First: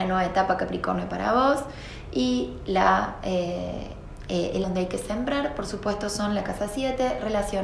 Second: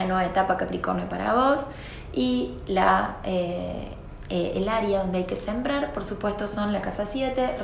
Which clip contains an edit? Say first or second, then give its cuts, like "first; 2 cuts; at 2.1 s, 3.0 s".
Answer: first; 1 cut; at 4.6 s